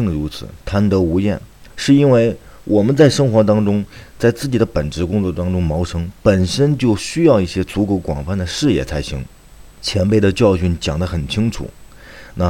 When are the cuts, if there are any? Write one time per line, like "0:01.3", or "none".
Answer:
0:01.7